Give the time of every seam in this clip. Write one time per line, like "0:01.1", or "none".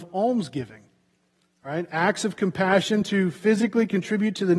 none